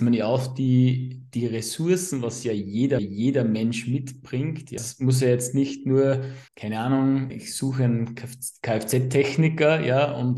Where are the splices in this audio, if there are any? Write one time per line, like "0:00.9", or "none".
0:03.0
0:04.8
0:06.5
0:07.3